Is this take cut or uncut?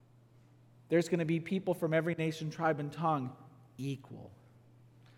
uncut